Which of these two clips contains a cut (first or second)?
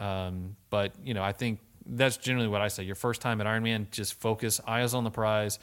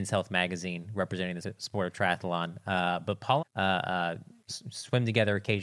second